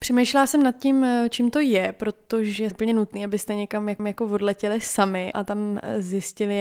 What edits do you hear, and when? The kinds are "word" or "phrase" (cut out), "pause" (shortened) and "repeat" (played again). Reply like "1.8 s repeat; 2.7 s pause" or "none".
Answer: 2.7 s phrase; 4.0 s repeat; 5.3 s word